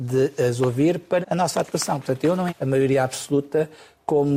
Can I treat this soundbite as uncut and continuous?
no; 2 cuts; at 1.2 s, 2.5 s

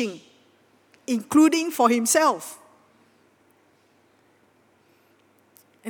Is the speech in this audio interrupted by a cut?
no; 0 cuts

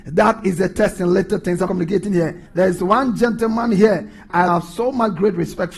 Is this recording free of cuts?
no; 3 cuts; at 1.7 s, 2.5 s, 4.5 s

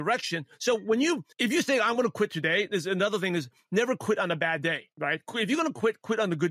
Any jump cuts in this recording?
yes; 2 cuts; at 1.3 s, 4.9 s

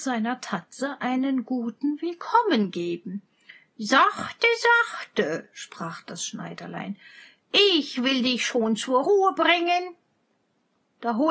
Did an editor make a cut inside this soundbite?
no; 0 cuts

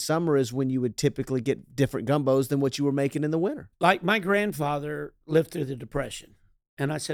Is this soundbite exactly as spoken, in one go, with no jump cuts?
no; 2 cuts; at 3.7 s, 5.2 s

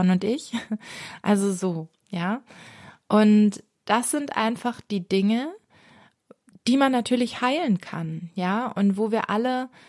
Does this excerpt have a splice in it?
no; 0 cuts

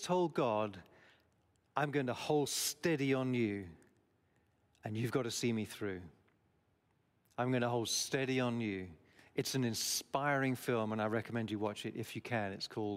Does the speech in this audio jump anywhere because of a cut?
no; 0 cuts

